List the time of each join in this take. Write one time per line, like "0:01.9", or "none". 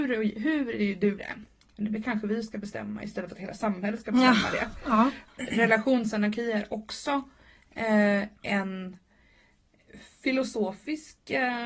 0:01.2